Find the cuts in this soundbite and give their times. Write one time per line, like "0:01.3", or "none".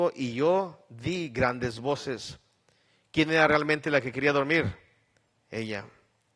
none